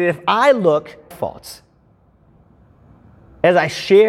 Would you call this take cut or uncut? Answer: cut